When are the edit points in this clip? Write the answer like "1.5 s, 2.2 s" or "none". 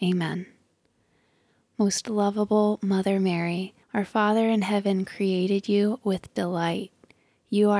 3.8 s